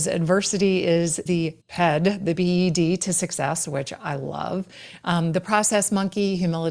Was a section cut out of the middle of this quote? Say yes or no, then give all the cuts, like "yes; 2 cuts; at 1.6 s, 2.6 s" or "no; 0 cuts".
yes; 2 cuts; at 1.3 s, 1.6 s